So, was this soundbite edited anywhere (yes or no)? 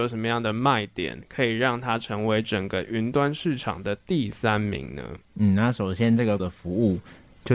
yes